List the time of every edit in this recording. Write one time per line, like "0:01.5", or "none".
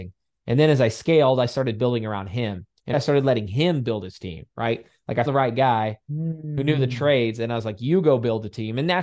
0:02.9
0:05.3